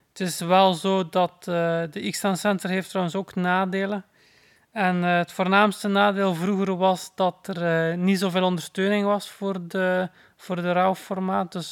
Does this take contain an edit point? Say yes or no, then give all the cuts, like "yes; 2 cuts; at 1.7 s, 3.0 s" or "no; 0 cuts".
no; 0 cuts